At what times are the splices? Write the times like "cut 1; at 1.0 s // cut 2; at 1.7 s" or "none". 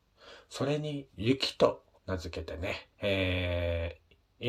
cut 1; at 2.0 s // cut 2; at 2.9 s